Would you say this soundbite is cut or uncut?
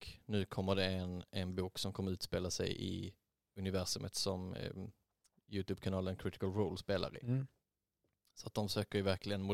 uncut